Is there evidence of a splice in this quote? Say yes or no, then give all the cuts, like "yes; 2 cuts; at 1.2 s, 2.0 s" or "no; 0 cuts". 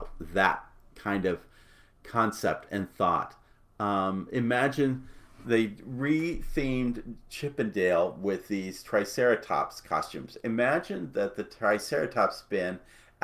no; 0 cuts